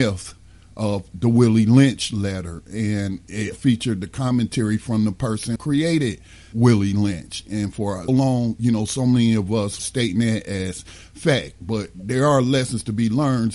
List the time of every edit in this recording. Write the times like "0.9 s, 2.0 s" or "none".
3.5 s, 5.6 s, 6.5 s, 8.1 s, 9.8 s